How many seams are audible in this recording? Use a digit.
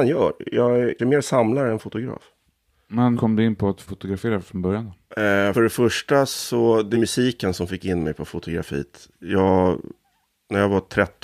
5